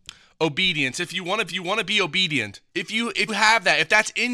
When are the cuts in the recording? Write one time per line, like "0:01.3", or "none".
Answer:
0:01.5
0:02.7
0:03.3